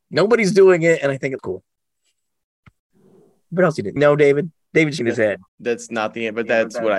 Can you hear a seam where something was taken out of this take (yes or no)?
yes